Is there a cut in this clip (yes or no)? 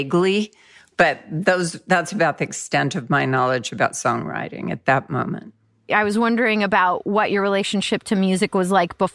no